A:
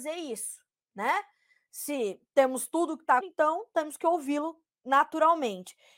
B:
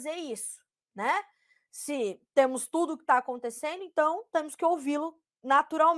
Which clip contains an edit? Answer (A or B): A